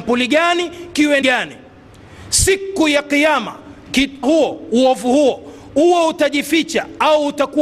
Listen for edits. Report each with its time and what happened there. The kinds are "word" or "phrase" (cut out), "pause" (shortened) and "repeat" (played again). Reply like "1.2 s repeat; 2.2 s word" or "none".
1.2 s phrase; 4.2 s word